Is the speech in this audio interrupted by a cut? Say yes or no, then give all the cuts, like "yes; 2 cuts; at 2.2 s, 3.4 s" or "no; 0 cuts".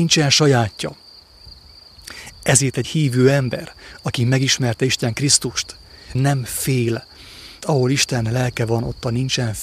yes; 4 cuts; at 2.8 s, 5.1 s, 6.1 s, 7.6 s